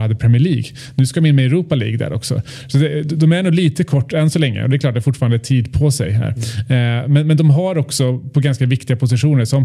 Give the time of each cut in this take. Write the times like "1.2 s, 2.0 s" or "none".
none